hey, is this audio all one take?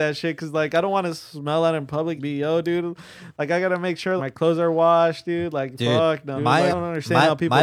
no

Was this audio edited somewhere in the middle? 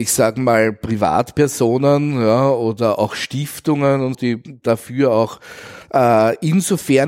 yes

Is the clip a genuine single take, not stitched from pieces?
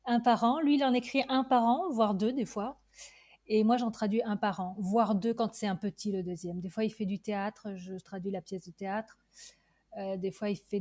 yes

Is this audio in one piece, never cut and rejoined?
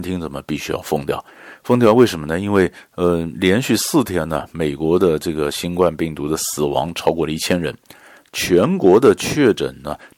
yes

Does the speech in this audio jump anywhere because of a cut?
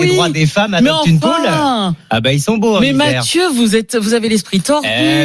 no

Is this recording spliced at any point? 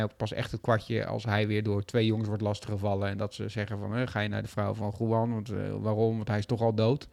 no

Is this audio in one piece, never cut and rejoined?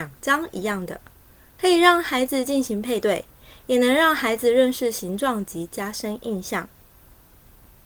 yes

